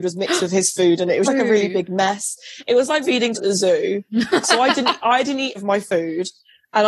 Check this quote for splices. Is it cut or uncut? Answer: cut